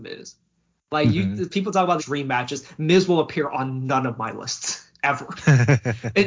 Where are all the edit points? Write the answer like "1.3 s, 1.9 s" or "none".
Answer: 2.0 s